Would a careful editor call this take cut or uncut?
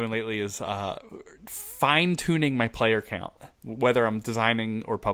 uncut